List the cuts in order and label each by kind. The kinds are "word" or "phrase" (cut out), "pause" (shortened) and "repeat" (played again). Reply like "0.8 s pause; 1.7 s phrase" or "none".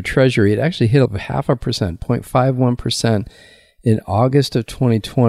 1.1 s word